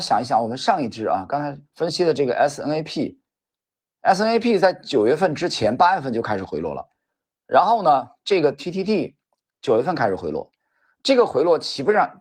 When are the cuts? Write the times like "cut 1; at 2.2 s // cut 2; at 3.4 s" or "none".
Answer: cut 1; at 1.7 s